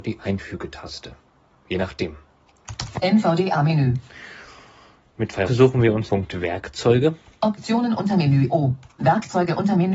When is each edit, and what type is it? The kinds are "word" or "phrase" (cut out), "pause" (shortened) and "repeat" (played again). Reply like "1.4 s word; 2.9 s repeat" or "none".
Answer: 5.5 s word; 6.1 s word